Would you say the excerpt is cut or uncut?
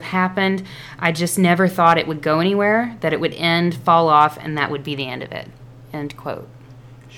uncut